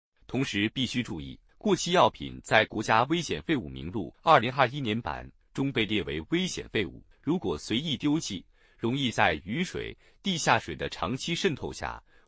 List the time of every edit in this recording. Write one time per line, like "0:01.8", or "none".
0:01.5
0:04.1
0:07.1

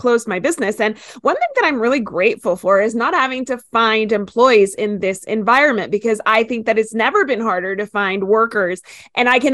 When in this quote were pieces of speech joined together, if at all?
none

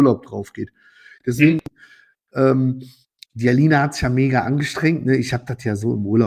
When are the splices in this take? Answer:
none

